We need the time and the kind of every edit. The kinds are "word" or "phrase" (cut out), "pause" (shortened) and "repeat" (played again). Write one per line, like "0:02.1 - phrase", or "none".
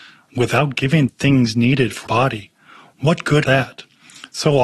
0:01.1 - word
0:02.1 - word
0:03.4 - word